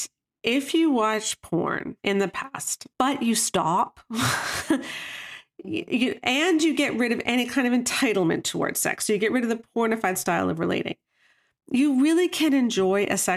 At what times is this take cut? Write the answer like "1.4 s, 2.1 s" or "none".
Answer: 2.0 s, 2.9 s